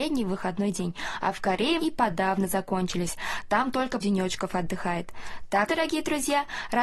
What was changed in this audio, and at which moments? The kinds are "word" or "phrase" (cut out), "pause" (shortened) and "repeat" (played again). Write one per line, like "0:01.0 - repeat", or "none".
0:01.8 - word
0:04.0 - word
0:05.7 - word